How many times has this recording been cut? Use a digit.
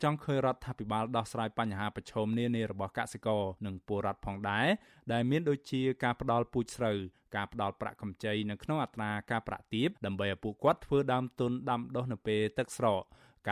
2